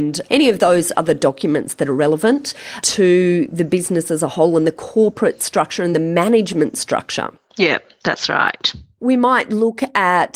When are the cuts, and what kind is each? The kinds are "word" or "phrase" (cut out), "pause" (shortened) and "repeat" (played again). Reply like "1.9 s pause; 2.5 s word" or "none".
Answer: none